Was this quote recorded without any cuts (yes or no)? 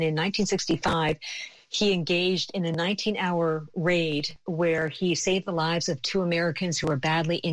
yes